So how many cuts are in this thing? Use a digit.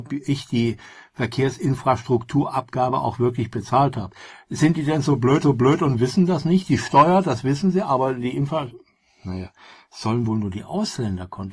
1